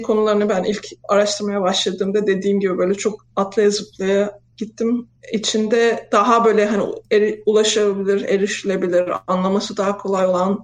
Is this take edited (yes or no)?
yes